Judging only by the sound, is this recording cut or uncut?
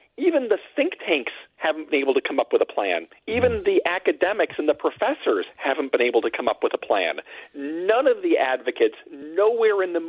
uncut